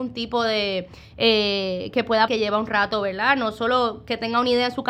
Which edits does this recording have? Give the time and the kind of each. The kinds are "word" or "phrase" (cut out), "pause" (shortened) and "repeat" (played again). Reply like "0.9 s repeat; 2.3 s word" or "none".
2.3 s word